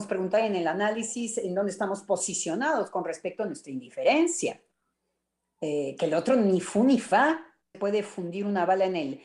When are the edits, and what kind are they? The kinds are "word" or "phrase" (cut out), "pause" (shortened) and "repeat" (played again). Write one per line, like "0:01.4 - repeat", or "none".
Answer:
0:07.7 - phrase